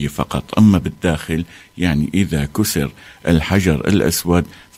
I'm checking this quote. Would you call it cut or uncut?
uncut